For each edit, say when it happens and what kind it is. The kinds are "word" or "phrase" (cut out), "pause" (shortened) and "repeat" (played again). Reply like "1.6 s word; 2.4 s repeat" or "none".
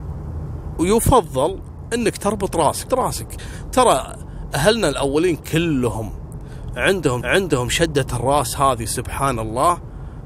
2.9 s word; 7.2 s repeat